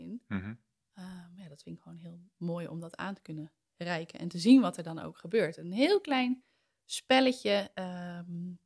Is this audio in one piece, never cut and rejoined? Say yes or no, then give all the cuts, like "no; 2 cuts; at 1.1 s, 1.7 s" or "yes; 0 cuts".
yes; 0 cuts